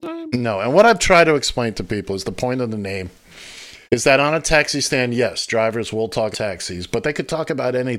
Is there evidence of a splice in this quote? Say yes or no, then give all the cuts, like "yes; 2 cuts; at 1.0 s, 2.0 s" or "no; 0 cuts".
yes; 2 cuts; at 3.8 s, 6.3 s